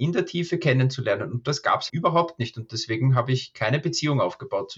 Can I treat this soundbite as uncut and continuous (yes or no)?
no